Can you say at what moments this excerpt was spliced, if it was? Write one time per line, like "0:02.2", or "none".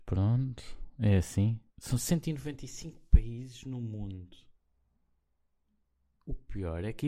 0:01.7
0:03.1